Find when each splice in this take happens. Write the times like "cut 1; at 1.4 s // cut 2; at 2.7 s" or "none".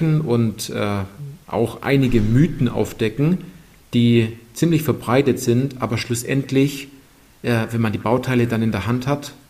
none